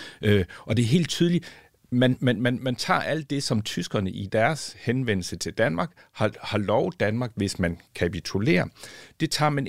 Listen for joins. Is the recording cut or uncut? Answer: uncut